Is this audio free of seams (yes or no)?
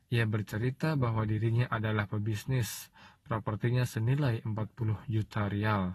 yes